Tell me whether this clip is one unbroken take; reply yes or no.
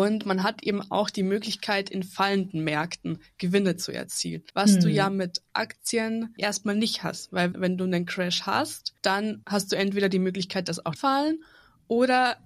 no